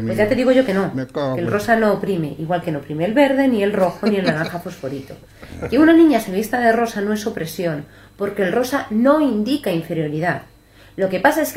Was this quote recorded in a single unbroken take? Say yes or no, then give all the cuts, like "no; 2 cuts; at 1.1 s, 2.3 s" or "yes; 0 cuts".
yes; 0 cuts